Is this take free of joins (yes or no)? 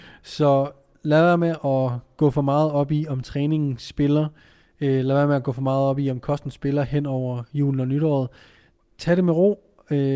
yes